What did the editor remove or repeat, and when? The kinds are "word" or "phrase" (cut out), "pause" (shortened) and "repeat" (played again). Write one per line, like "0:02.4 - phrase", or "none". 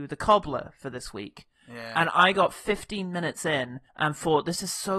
0:03.9 - pause

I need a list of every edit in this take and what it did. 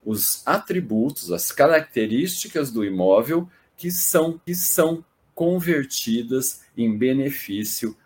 0:04.5 - repeat

